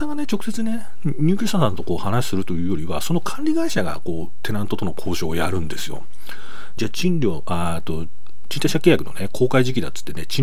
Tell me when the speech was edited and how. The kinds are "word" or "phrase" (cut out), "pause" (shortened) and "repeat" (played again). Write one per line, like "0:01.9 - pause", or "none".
0:06.8 - phrase